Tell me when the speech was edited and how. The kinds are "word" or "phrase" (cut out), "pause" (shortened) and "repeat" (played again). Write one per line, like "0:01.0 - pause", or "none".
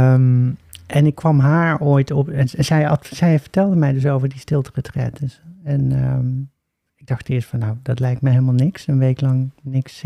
none